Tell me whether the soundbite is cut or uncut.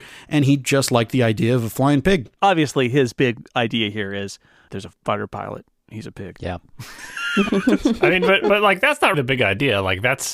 cut